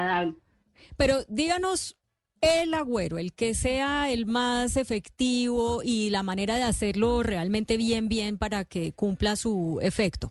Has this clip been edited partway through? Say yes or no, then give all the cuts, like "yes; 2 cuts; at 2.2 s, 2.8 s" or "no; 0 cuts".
no; 0 cuts